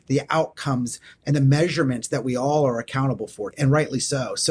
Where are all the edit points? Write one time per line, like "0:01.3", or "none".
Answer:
0:03.5